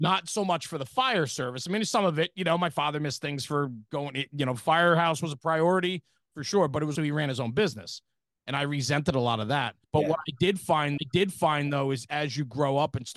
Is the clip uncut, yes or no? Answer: no